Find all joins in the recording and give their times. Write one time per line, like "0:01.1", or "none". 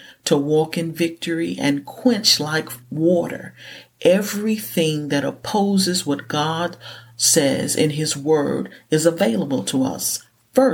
none